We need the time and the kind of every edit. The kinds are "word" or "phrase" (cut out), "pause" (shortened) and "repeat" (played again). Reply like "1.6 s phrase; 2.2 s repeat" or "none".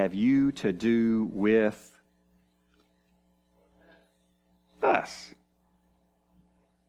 none